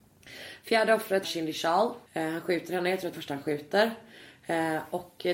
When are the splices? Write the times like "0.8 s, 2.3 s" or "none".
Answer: 1.2 s, 2.1 s, 3.1 s